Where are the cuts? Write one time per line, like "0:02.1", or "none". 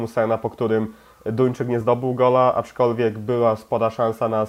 none

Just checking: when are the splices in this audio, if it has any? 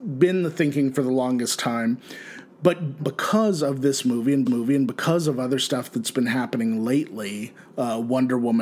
0:03.0
0:04.5

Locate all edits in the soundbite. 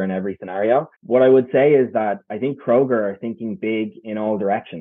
0:00.9

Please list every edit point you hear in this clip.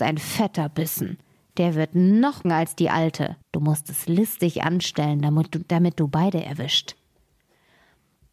0:02.4
0:03.4

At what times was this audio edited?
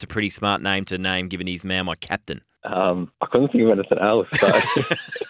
0:03.1

